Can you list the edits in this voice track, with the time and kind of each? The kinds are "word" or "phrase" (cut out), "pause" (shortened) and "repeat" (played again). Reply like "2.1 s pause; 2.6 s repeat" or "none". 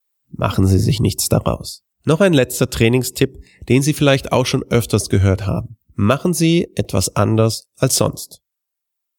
1.9 s pause; 5.8 s pause